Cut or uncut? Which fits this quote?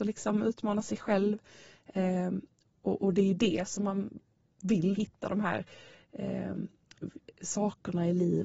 cut